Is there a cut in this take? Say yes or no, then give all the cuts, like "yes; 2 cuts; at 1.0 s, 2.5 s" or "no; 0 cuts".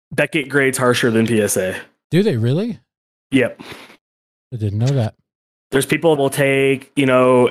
yes; 1 cut; at 6.2 s